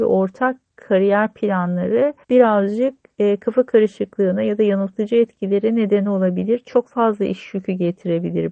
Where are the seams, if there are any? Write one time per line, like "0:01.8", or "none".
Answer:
0:02.2